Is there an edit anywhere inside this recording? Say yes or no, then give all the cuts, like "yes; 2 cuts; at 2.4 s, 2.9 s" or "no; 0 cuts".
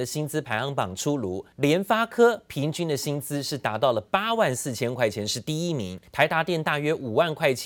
yes; 2 cuts; at 1.5 s, 6.1 s